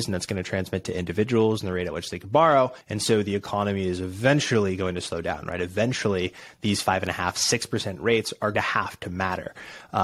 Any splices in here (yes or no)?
yes